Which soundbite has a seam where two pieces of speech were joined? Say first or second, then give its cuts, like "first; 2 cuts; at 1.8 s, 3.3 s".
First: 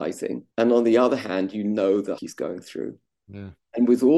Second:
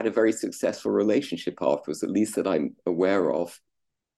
first; 1 cut; at 2.2 s